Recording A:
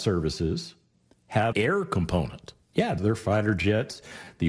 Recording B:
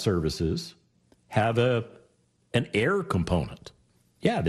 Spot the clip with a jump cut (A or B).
A